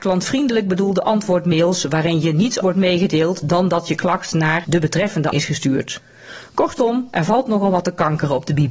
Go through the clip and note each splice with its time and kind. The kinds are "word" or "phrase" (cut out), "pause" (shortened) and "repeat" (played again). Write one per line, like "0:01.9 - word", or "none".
0:02.6 - word
0:05.3 - word